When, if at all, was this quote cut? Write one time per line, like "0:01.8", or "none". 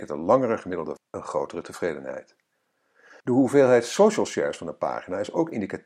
0:01.0
0:03.2